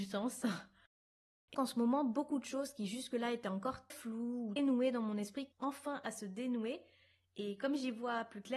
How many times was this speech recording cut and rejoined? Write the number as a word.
four